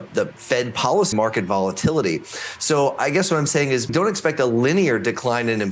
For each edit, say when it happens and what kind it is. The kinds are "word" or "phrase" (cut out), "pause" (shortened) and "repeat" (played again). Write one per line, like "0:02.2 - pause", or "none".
0:01.1 - phrase
0:03.9 - word